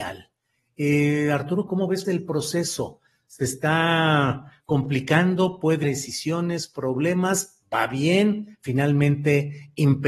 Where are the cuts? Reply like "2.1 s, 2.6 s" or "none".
1.7 s, 2.0 s, 5.8 s